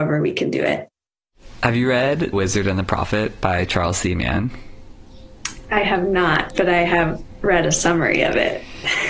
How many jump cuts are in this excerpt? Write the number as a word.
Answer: one